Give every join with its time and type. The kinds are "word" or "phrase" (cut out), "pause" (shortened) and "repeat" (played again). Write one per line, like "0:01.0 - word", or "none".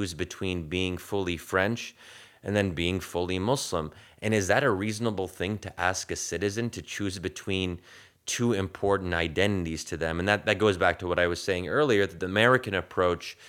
none

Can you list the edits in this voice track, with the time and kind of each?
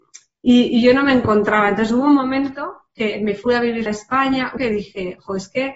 0:03.9 - word
0:04.6 - phrase

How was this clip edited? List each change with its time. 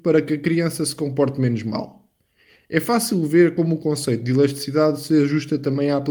none

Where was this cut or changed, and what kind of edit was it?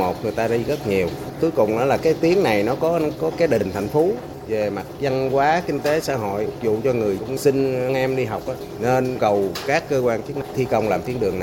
0:02.0 - word
0:03.3 - word
0:07.2 - word
0:09.2 - word

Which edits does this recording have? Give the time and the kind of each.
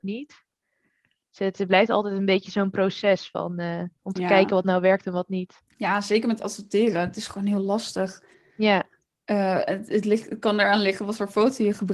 0:03.9 - pause
0:05.7 - pause
0:08.3 - pause

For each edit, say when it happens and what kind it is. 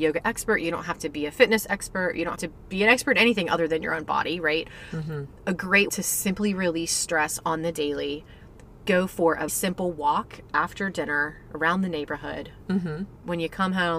0:02.4 - word
0:05.9 - word
0:09.5 - word

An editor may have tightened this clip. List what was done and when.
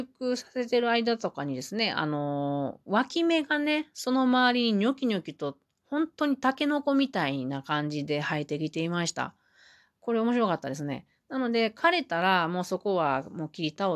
none

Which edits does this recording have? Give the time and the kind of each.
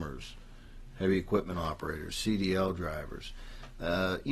none

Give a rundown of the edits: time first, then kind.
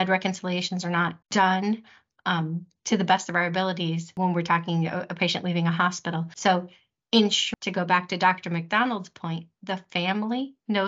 0:01.2 - pause

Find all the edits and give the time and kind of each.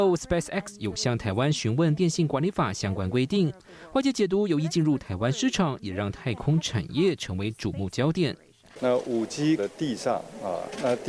0:09.6 - word

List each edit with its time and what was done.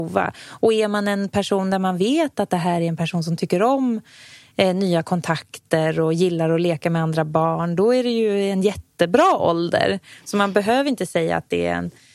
none

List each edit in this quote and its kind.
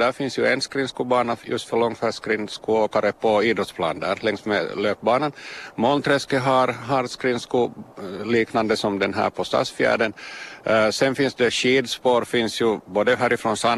none

